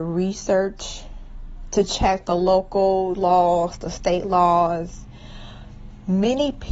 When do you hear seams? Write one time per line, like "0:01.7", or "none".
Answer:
none